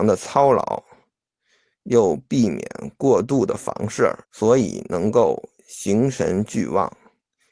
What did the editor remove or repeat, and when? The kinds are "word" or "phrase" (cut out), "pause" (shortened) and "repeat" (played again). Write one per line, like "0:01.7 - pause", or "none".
0:04.2 - pause

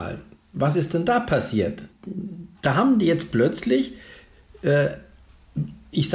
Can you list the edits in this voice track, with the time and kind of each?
none

